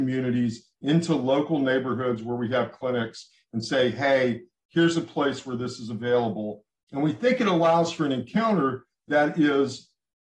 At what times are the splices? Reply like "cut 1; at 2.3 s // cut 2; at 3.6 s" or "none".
none